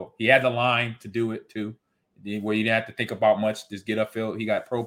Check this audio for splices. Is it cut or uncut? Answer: uncut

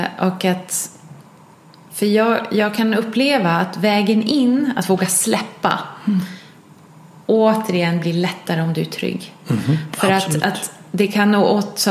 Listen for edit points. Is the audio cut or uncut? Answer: uncut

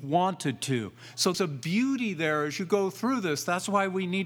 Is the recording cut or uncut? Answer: cut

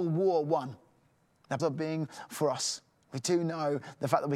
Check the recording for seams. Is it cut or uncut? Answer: cut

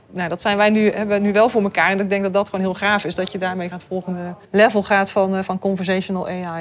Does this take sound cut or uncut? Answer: cut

